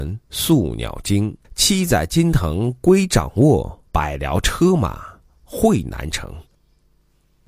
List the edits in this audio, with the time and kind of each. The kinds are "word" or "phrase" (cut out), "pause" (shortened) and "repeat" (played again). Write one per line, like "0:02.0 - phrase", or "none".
0:01.4 - pause
0:03.9 - pause
0:06.5 - pause